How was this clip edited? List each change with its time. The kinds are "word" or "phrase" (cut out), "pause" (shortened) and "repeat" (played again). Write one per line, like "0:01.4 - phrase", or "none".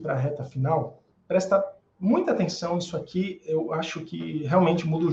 0:01.1 - word